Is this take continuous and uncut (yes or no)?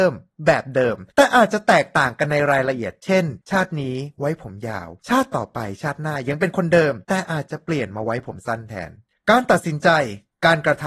no